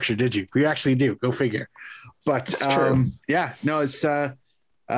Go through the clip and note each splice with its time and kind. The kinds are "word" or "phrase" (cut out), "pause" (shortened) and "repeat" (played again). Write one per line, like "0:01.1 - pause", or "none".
0:03.2 - pause